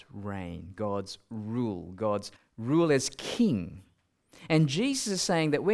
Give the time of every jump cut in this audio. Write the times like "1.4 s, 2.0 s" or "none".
2.4 s